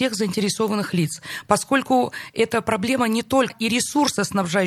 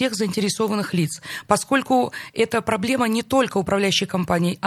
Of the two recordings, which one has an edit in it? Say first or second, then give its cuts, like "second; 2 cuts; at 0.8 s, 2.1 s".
first; 1 cut; at 3.5 s